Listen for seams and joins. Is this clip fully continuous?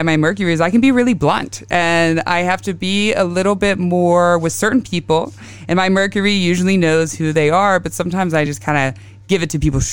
yes; 0 cuts

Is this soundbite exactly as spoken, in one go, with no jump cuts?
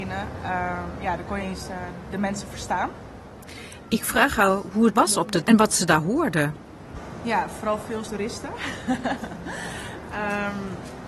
no; 4 cuts; at 1.4 s, 4.9 s, 5.4 s, 8.0 s

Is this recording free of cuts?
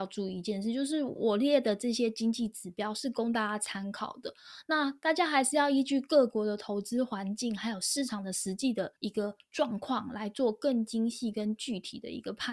no; 1 cut; at 9.0 s

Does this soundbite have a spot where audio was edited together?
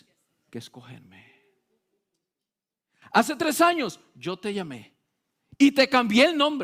no; 0 cuts

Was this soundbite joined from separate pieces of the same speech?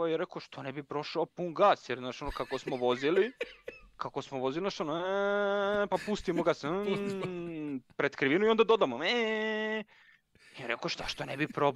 no; 0 cuts

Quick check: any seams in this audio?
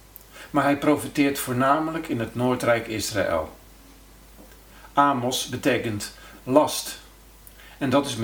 no; 0 cuts

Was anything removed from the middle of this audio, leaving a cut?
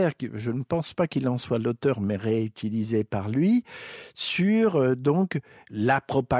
no; 0 cuts

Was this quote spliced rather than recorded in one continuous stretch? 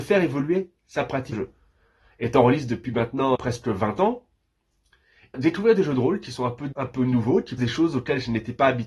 yes; 5 cuts; at 1.3 s, 3.3 s, 5.3 s, 6.7 s, 7.6 s

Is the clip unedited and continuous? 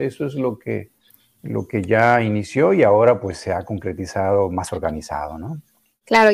yes; 0 cuts

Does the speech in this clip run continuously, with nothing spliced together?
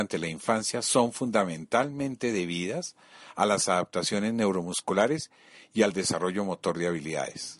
yes; 0 cuts

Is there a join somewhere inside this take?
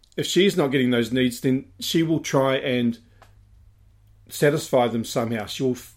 no; 0 cuts

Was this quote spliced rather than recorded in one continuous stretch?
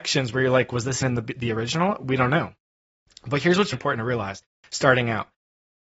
yes; 2 cuts; at 1.0 s, 3.7 s

